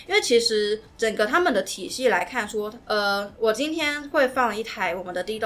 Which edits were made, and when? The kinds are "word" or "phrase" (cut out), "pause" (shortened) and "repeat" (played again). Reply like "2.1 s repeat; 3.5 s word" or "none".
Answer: 2.8 s pause